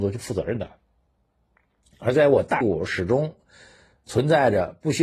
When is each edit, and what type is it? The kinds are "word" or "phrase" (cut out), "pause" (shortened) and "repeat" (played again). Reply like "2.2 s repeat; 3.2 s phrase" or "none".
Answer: 2.6 s word